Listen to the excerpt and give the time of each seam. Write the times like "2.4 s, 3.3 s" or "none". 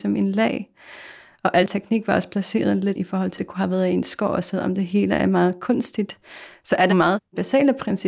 3.4 s, 6.9 s